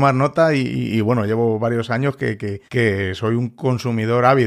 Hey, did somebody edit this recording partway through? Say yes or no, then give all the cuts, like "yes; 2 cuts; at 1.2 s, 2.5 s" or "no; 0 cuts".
yes; 1 cut; at 2.7 s